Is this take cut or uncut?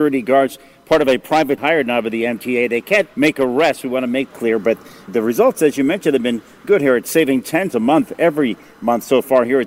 cut